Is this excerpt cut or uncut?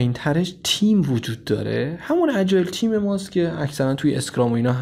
uncut